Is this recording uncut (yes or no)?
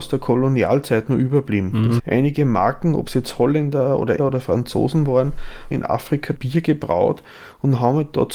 no